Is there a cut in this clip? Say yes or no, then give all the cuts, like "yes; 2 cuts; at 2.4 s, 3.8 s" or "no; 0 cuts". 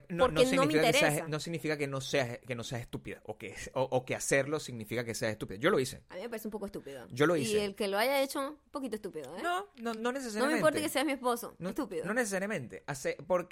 yes; 2 cuts; at 8.7 s, 10.0 s